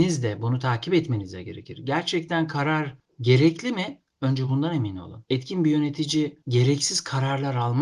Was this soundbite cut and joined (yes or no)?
no